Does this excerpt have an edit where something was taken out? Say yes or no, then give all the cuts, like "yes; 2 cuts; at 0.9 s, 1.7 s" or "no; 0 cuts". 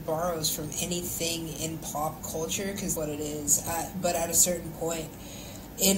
yes; 1 cut; at 2.9 s